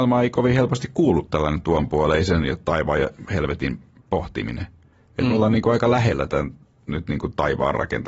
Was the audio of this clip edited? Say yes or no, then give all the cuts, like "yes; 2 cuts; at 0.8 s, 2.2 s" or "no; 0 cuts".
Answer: no; 0 cuts